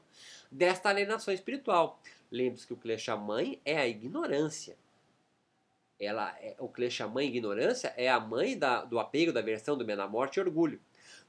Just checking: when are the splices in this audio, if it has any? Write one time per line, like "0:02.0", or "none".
none

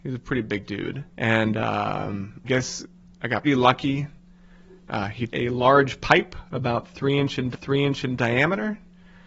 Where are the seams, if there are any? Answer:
0:01.1
0:02.4
0:03.1
0:03.4
0:05.3
0:07.5

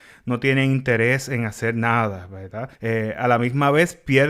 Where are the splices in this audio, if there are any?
0:02.7

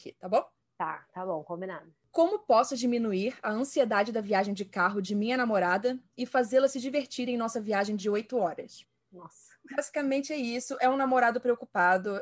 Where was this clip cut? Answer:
none

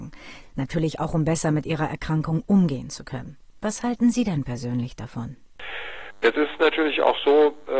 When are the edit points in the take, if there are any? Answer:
0:03.5

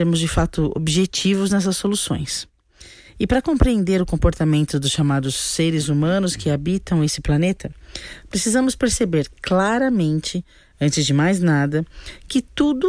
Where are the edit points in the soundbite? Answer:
none

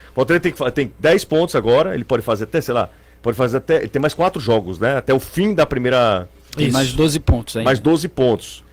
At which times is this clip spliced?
none

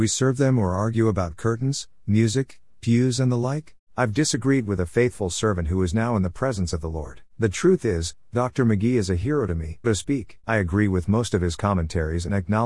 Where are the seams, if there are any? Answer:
0:03.8
0:07.3
0:09.8
0:10.4

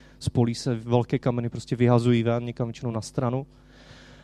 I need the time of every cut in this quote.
none

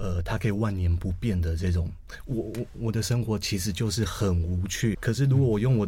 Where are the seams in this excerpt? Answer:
0:04.9

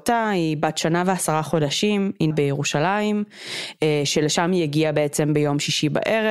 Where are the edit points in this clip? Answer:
0:02.3

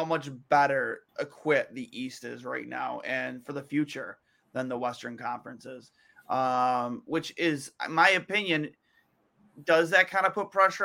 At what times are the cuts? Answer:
0:01.1

